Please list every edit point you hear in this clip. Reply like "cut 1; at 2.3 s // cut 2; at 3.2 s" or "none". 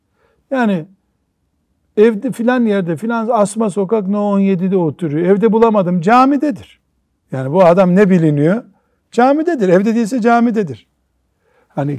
none